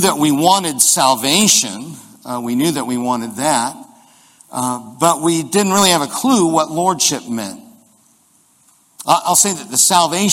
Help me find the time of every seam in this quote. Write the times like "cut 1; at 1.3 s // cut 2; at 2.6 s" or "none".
none